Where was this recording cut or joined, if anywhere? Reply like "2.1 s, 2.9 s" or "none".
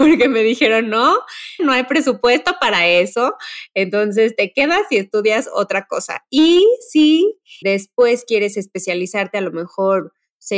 1.6 s, 7.6 s